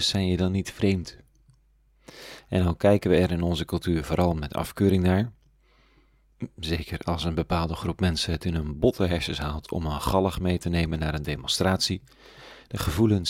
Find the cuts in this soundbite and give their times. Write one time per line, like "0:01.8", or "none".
none